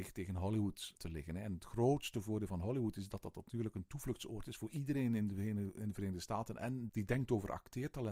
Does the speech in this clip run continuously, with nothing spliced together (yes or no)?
no